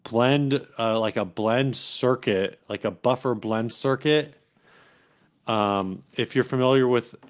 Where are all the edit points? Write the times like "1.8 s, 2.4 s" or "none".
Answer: 6.1 s